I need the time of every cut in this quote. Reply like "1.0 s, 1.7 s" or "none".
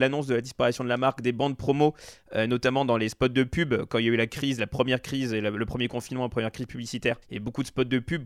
7.2 s